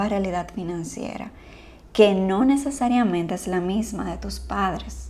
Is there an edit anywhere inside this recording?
no; 0 cuts

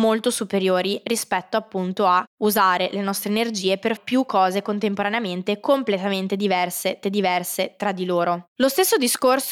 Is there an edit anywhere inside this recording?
yes; 2 cuts; at 4.0 s, 7.0 s

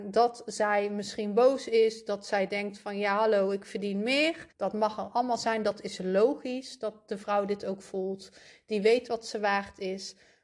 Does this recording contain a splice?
yes; 1 cut; at 4.5 s

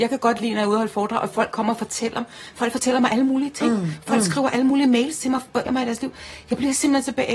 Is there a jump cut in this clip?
yes; 1 cut; at 5.7 s

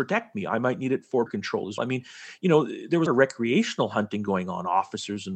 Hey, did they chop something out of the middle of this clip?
yes; 3 cuts; at 1.3 s, 1.8 s, 3.1 s

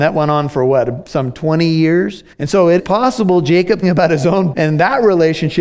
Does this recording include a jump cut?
yes; 4 cuts; at 2.3 s, 2.8 s, 3.8 s, 4.5 s

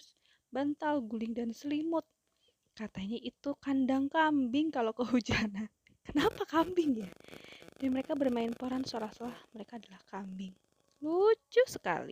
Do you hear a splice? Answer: no; 0 cuts

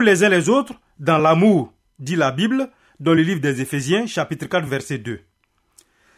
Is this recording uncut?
yes; 0 cuts

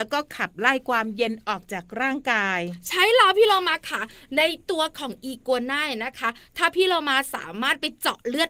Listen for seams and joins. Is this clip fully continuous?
yes; 0 cuts

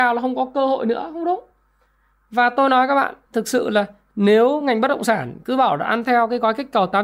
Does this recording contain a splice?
no; 0 cuts

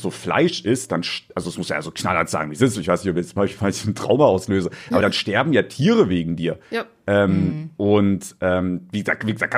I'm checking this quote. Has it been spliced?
no; 0 cuts

